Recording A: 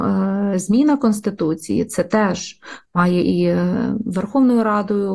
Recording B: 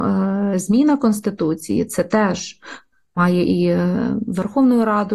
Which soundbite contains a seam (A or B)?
A